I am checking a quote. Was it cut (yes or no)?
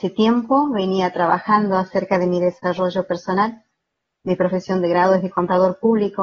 no